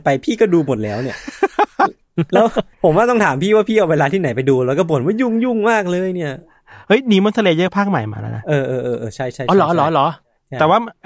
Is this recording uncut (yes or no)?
no